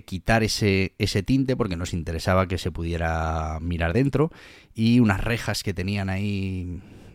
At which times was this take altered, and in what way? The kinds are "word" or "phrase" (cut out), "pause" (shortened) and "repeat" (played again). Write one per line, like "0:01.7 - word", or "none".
none